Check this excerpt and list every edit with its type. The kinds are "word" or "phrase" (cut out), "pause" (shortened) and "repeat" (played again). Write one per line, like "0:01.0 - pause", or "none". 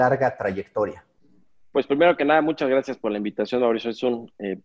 none